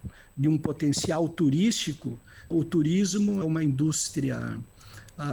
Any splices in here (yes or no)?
yes